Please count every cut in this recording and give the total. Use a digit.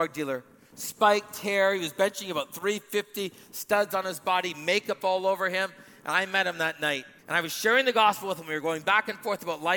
1